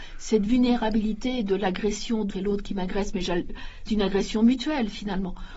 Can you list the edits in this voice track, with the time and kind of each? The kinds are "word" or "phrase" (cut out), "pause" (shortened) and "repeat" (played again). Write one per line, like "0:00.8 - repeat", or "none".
0:02.3 - word
0:03.9 - word

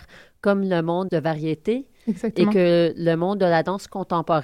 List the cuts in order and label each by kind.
0:01.1 - phrase

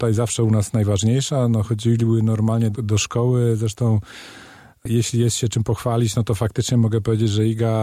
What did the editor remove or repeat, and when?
0:02.7 - word

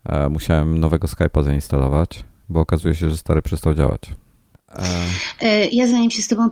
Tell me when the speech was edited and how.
none

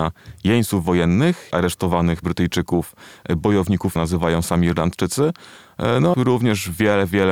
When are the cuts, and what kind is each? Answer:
0:01.5 - word
0:02.2 - word
0:04.0 - word
0:06.1 - word

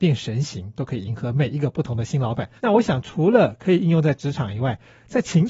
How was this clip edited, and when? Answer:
0:02.6 - pause

